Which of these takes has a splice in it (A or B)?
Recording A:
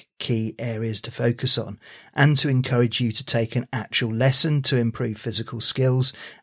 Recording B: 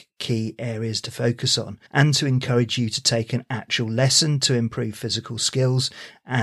B